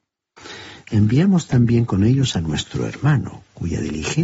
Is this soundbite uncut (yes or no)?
yes